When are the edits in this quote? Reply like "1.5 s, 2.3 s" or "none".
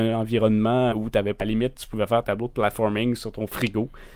0.9 s, 1.4 s, 2.2 s

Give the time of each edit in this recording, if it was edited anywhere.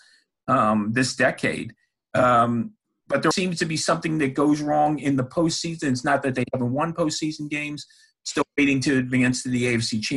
3.3 s

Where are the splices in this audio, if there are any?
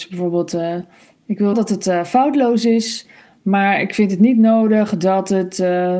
1.5 s

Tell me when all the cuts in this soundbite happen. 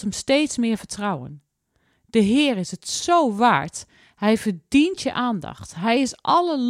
none

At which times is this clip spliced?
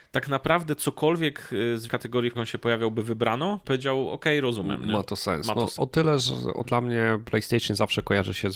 1.9 s, 2.3 s, 3.6 s, 5.8 s, 6.6 s

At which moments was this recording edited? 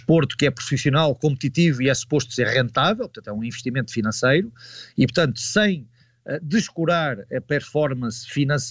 none

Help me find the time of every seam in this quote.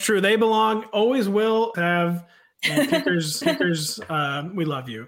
1.7 s, 3.4 s

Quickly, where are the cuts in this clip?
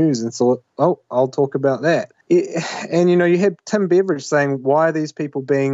2.2 s

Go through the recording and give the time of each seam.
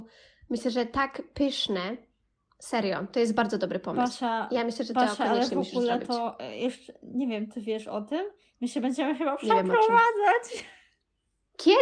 none

